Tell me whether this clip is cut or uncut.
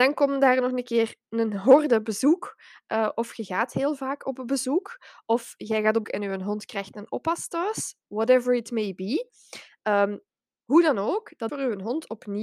cut